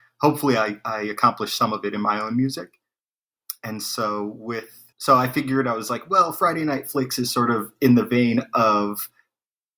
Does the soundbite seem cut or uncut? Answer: cut